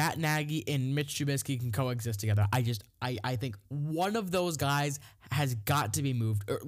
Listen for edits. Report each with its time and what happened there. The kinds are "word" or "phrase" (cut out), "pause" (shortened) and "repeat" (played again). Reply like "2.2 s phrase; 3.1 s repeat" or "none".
3.6 s pause